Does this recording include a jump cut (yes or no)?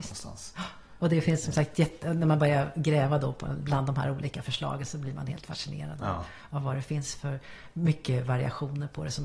no